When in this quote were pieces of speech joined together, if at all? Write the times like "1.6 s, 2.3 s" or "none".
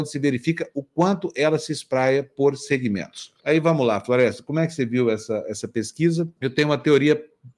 3.4 s, 6.4 s